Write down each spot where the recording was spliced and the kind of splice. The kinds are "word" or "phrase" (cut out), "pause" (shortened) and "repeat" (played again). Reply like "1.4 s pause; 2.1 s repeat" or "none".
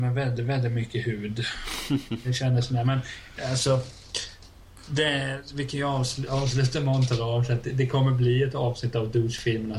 none